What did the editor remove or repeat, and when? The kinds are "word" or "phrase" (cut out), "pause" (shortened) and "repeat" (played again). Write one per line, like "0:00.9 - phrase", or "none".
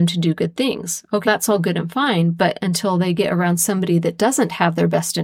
0:01.2 - word